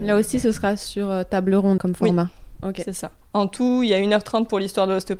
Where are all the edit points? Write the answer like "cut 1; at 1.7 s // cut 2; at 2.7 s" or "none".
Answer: cut 1; at 1.8 s // cut 2; at 3.2 s